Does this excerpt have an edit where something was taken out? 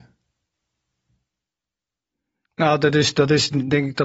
no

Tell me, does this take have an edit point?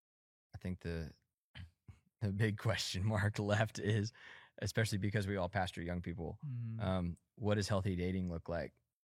no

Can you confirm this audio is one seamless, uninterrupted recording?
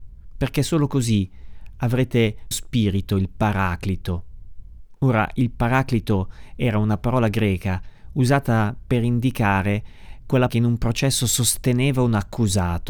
no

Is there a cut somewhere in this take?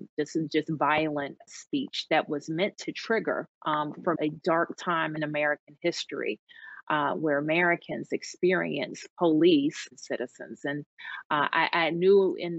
yes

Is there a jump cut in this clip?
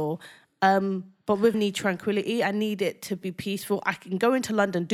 yes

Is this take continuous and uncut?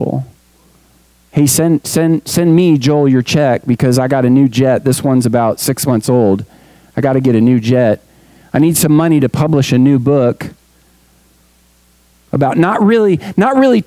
yes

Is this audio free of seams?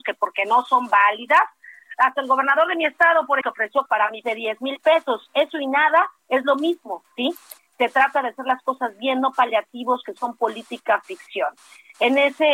no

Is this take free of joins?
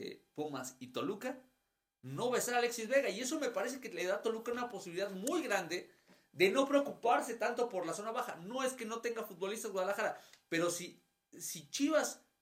yes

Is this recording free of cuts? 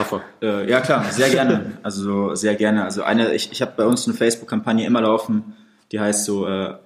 yes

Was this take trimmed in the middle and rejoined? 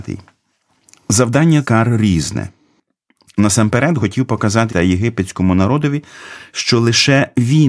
yes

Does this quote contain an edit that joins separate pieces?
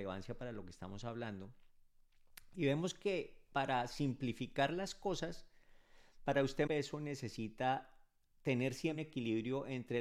yes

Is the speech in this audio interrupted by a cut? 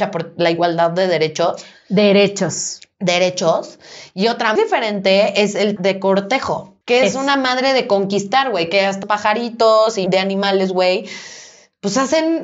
yes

